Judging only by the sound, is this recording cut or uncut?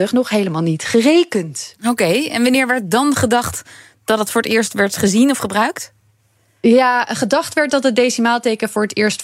uncut